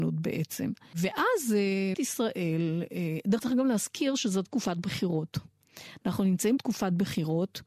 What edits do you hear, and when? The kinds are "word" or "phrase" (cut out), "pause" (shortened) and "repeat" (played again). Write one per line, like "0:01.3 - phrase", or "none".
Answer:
0:01.9 - word
0:03.4 - word
0:04.4 - word
0:06.6 - word

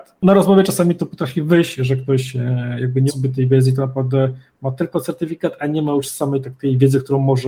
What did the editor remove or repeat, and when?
0:03.1 - word

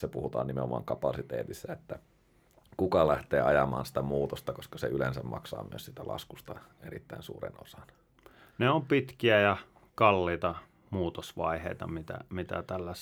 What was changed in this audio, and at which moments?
none

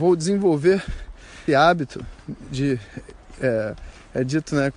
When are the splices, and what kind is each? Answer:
0:01.5 - word

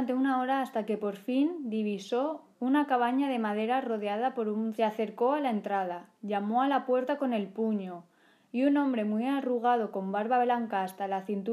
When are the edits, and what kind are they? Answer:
0:02.5 - pause
0:04.8 - phrase

